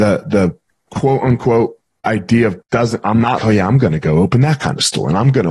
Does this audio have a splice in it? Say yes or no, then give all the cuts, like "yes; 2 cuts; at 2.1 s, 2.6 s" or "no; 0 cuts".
yes; 2 cuts; at 2.6 s, 3.4 s